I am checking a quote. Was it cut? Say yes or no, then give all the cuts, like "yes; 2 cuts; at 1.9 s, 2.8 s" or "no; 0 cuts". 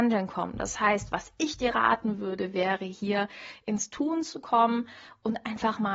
no; 0 cuts